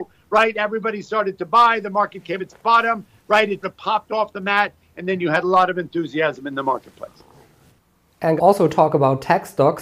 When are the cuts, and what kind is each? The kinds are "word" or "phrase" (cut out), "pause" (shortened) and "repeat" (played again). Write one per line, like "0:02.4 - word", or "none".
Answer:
0:02.4 - word
0:03.6 - word
0:08.4 - phrase